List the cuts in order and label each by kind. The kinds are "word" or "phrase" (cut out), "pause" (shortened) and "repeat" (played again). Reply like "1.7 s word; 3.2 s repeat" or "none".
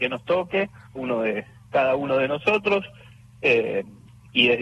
1.0 s word